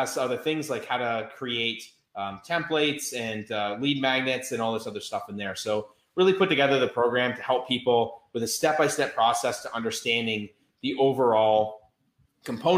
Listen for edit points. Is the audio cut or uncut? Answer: uncut